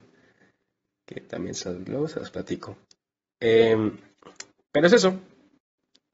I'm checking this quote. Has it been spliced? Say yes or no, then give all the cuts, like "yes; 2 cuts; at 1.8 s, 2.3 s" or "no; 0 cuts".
no; 0 cuts